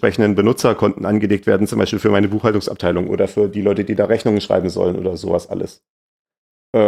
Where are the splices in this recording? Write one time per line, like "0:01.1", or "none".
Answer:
none